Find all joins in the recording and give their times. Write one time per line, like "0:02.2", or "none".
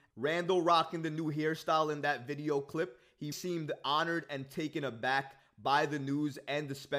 0:03.3